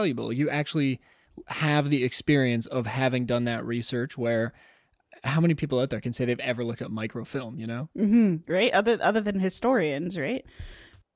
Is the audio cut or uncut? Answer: uncut